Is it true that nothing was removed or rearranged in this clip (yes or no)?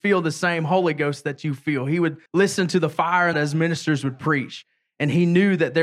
no